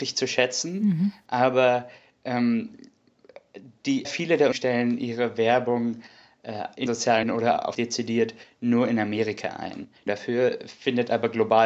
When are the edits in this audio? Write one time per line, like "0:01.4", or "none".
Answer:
0:04.0
0:04.5
0:06.9
0:07.2
0:07.7
0:10.1

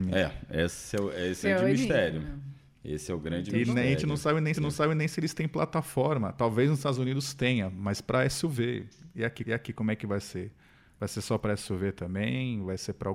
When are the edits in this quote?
0:01.4
0:04.6
0:09.4

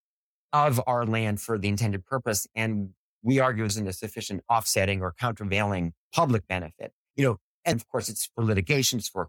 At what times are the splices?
0:03.7
0:06.0
0:07.7

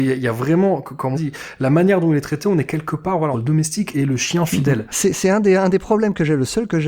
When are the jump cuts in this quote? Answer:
0:01.1
0:03.3
0:03.9

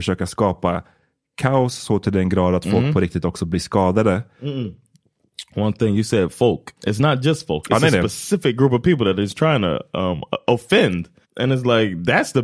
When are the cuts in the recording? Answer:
0:06.8
0:11.2

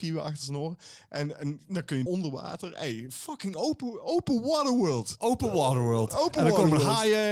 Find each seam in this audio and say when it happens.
0:02.1

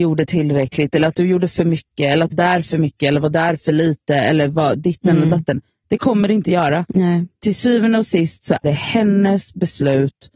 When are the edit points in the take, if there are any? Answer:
0:02.3
0:08.6

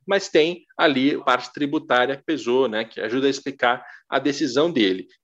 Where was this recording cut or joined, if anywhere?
0:01.2
0:02.2

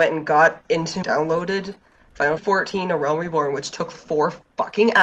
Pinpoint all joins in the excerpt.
0:01.0
0:02.4
0:03.9

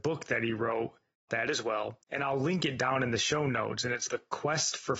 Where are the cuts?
0:01.3
0:02.0
0:04.1

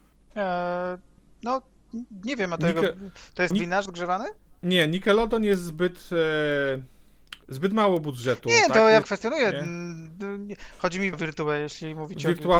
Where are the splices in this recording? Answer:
0:01.2
0:03.5
0:03.9
0:04.6
0:07.4
0:09.0
0:11.1

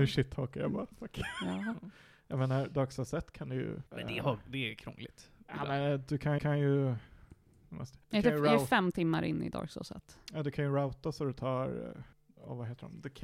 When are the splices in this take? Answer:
0:00.9
0:03.9
0:05.4
0:06.4
0:08.0
0:12.1

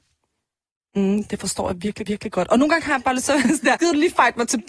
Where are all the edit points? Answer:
0:02.1
0:03.8

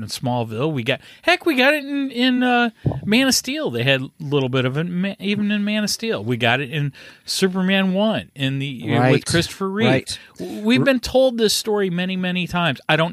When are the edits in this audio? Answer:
none

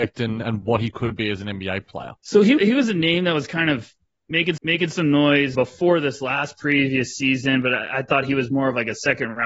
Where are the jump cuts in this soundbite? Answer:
0:02.2
0:02.6
0:04.6
0:05.5

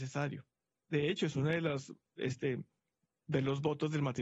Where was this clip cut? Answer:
none

